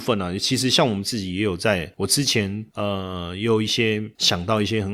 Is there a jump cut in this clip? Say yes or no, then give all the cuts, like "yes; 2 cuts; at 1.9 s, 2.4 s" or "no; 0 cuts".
no; 0 cuts